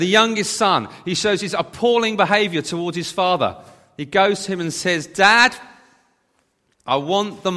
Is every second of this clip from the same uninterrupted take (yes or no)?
yes